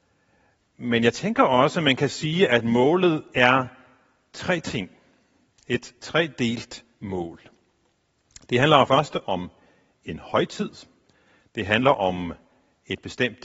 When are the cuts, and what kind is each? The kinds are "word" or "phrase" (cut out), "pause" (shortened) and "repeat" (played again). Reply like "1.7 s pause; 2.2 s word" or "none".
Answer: 8.9 s phrase